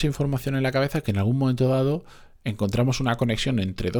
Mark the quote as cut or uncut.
uncut